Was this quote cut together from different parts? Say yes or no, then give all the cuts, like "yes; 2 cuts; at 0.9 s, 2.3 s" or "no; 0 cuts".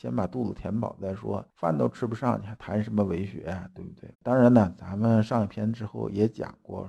yes; 1 cut; at 4.1 s